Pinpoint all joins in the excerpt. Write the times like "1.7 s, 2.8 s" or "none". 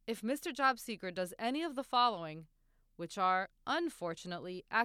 none